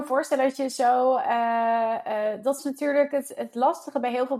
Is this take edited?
no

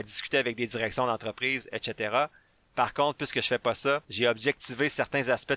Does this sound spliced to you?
no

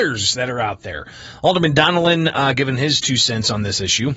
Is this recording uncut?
yes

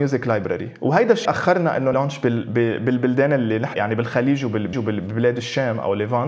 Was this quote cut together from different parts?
yes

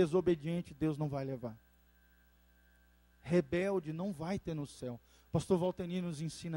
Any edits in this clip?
no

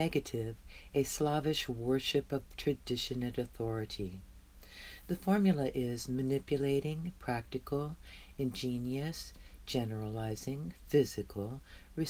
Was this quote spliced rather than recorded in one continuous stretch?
no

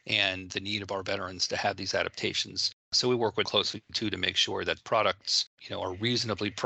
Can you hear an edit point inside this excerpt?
yes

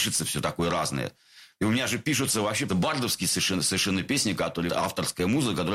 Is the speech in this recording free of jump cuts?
no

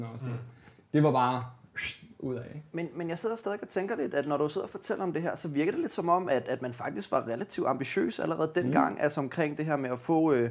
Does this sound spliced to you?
no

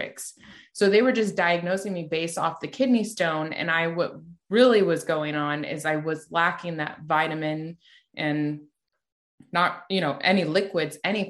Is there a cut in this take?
no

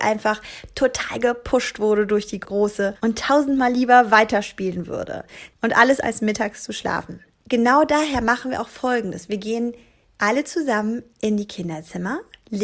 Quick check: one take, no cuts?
no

